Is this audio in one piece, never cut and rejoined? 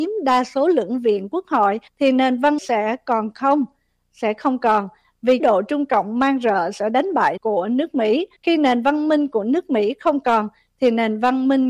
no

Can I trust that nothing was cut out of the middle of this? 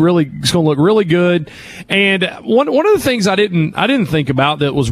yes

